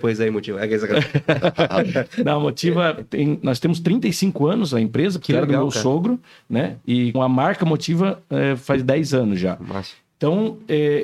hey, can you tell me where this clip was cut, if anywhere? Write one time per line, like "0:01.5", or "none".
0:07.1

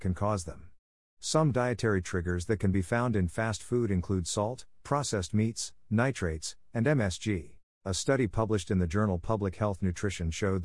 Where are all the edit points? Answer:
0:07.7

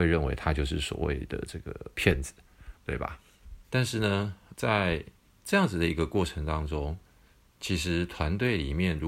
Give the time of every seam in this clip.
0:03.6
0:04.5

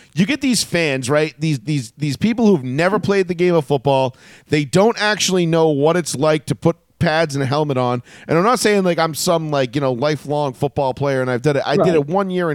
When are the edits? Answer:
none

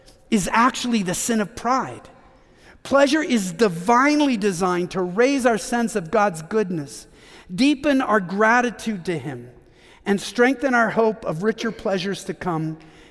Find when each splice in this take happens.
none

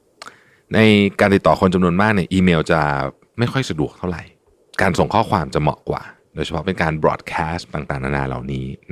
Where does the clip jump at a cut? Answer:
0:07.7

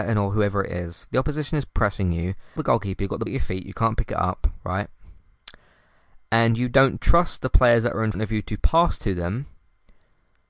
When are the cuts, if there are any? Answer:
0:02.6
0:03.3
0:08.1

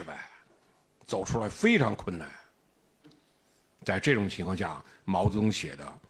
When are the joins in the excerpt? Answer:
none

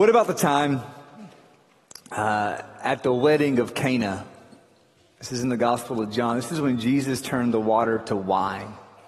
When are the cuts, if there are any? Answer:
none

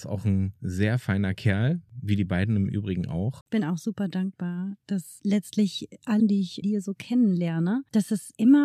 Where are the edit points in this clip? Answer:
0:06.2
0:06.6

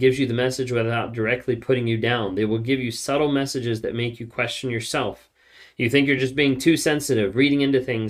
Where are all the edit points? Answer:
none

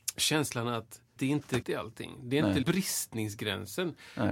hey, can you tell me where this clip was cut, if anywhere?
0:01.2
0:01.6
0:02.6

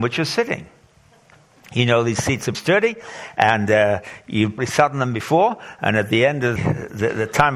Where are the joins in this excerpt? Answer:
0:02.5
0:04.6
0:06.6

